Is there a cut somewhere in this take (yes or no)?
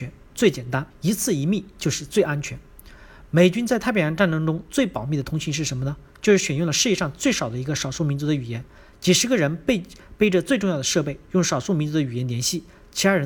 yes